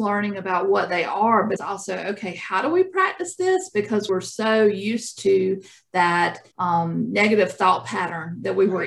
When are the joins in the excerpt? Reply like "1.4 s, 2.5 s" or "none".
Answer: 1.6 s, 4.1 s, 6.5 s